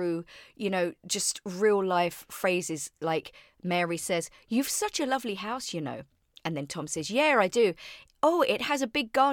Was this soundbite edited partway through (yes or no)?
no